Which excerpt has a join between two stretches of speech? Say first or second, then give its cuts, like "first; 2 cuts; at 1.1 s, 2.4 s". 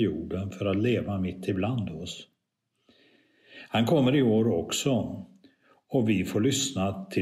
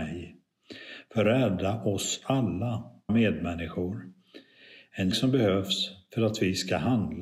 second; 2 cuts; at 3.1 s, 5.1 s